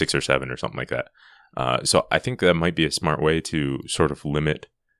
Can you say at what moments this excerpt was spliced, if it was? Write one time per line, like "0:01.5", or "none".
none